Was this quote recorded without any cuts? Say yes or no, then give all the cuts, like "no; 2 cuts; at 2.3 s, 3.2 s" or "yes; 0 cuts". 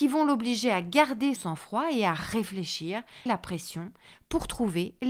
no; 2 cuts; at 1.4 s, 3.3 s